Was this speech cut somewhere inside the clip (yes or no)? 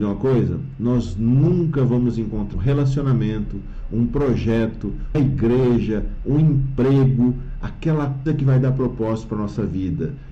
yes